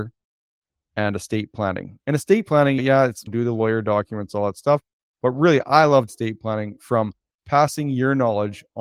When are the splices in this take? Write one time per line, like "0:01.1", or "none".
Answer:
0:03.2
0:06.1